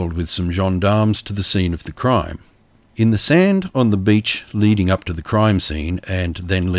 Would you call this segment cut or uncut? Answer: uncut